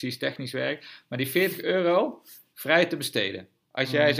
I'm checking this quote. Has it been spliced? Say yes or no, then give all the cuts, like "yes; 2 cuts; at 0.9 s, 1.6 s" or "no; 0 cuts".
no; 0 cuts